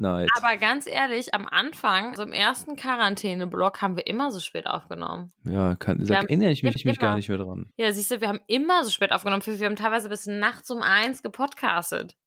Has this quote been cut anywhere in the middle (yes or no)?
yes